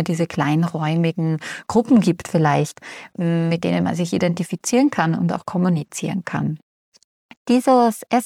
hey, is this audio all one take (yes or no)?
yes